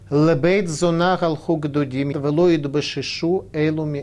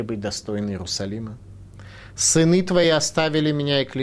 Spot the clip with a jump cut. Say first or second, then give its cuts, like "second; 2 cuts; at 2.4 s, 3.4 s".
first; 1 cut; at 2.1 s